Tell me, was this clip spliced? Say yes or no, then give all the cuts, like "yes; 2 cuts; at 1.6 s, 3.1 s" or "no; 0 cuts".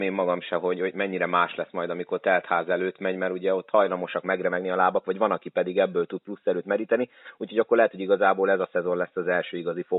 no; 0 cuts